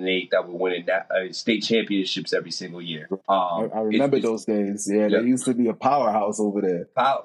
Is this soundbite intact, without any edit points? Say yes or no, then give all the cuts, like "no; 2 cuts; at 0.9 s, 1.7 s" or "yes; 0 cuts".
no; 1 cut; at 3.2 s